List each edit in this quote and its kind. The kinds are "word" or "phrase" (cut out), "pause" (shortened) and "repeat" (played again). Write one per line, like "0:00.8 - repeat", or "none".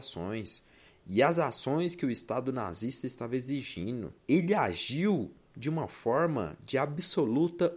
0:04.2 - pause